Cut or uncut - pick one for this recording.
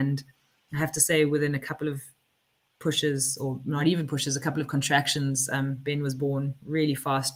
uncut